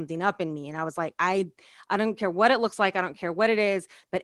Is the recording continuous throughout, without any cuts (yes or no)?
yes